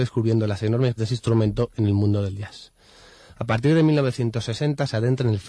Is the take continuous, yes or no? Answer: no